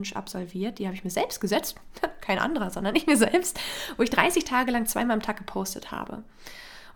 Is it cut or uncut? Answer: uncut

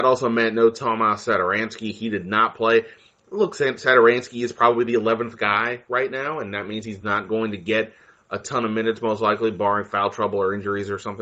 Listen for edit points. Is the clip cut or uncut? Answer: uncut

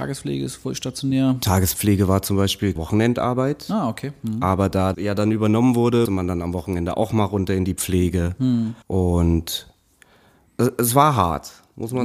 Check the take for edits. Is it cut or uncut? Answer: cut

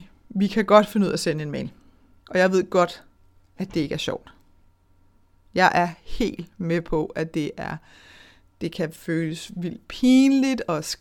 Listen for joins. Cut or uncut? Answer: uncut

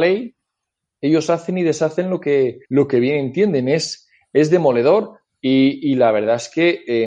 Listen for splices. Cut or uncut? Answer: cut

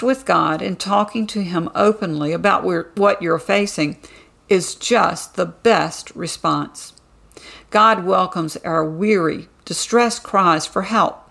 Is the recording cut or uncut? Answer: uncut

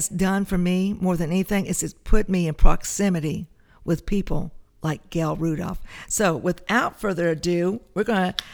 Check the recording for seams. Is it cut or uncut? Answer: uncut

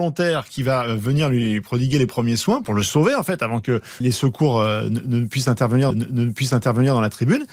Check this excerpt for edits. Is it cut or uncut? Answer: cut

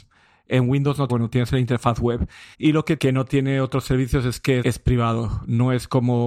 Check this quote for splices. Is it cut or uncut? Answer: cut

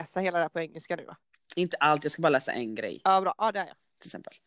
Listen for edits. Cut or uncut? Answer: uncut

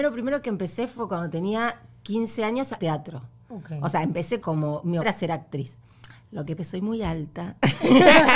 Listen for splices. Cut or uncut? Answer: cut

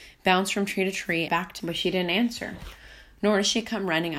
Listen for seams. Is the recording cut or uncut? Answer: cut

